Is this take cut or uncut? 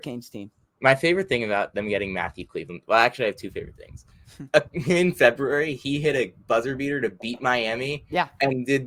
uncut